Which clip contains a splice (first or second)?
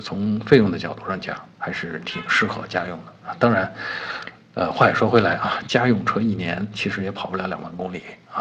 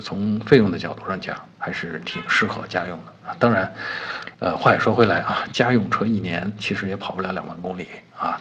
second